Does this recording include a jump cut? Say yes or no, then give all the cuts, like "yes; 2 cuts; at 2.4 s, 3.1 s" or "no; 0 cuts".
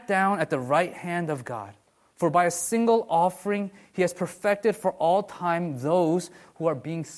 yes; 1 cut; at 1.9 s